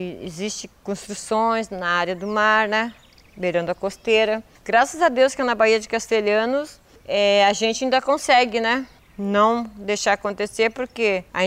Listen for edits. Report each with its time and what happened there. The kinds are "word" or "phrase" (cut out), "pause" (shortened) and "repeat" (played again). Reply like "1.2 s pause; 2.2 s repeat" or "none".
none